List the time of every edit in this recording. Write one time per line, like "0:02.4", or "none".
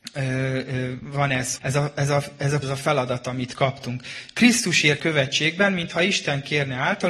0:01.6
0:02.6
0:05.0